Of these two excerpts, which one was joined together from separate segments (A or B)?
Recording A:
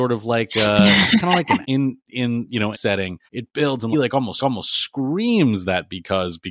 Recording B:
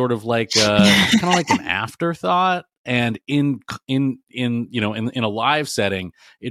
A